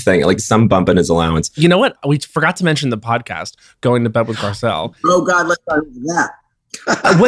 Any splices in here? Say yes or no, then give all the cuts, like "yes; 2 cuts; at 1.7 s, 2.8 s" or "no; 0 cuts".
no; 0 cuts